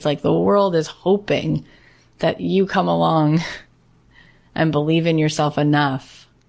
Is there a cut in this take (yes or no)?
no